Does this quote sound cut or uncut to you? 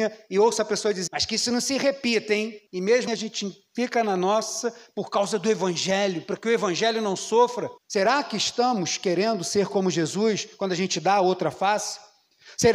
cut